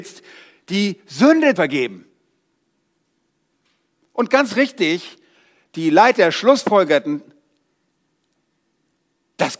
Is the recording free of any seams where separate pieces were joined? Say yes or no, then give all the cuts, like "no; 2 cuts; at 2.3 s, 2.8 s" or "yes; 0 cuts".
no; 1 cut; at 1.6 s